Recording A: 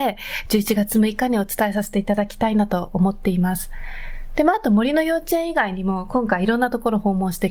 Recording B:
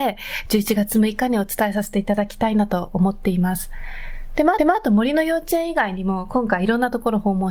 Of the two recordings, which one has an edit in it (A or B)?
B